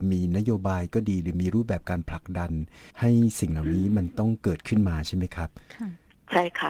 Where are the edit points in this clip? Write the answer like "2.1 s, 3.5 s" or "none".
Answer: 2.9 s